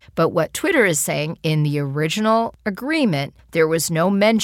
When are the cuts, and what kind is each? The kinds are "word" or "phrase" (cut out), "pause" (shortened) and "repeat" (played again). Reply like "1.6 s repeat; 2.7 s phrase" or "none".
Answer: none